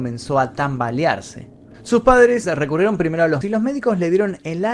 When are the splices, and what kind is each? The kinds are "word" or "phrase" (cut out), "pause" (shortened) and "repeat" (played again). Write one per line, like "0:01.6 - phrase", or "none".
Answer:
0:02.4 - word
0:03.4 - word